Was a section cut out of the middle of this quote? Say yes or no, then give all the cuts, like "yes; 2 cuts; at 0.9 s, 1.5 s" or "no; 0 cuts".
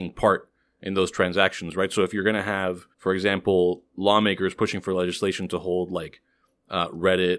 yes; 1 cut; at 2.9 s